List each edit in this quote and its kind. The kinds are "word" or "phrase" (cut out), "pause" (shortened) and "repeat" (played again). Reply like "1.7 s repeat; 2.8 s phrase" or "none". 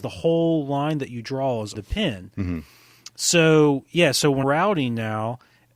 1.7 s word; 4.4 s word